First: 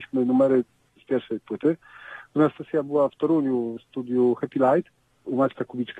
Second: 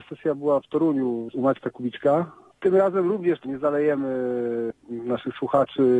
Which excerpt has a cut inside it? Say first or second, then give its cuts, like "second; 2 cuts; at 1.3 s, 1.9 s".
second; 1 cut; at 1.3 s